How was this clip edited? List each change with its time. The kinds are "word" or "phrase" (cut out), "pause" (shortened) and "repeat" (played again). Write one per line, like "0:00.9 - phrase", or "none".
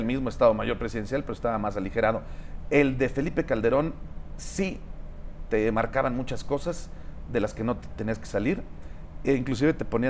none